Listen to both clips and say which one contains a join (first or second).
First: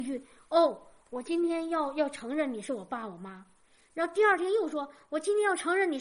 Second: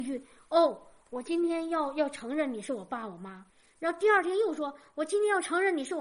second